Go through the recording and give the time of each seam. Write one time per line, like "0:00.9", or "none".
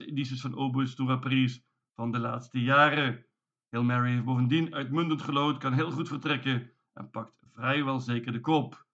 none

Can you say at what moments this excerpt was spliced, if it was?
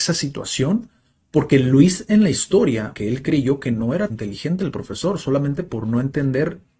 0:02.9
0:04.1

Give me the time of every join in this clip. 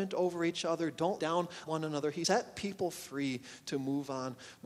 0:01.2
0:01.7
0:02.2

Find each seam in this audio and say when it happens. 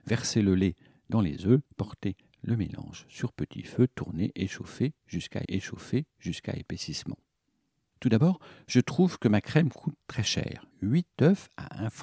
0:01.6
0:05.5
0:10.7

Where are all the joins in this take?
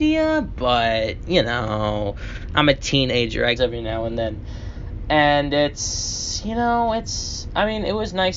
0:03.6

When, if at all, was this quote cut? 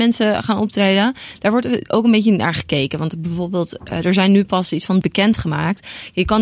0:05.0

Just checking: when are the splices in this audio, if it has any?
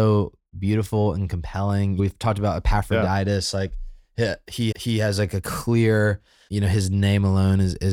0:02.0
0:04.7
0:06.5

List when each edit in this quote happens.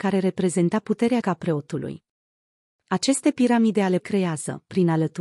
0:01.2
0:04.0

